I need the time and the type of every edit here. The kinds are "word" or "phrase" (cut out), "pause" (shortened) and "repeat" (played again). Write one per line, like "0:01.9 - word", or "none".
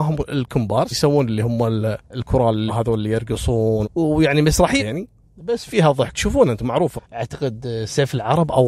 0:00.9 - word
0:02.0 - pause
0:02.7 - word
0:03.8 - word
0:04.8 - word
0:05.2 - pause
0:06.1 - word
0:07.0 - word